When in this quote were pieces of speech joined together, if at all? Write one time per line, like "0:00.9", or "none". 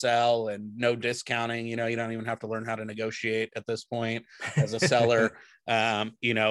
none